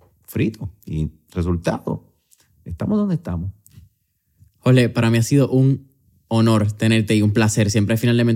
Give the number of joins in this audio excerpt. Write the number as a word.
zero